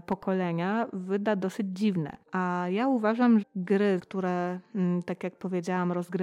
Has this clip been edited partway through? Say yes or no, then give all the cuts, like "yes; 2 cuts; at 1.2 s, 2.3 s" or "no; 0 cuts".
yes; 3 cuts; at 2.2 s, 3.4 s, 4.0 s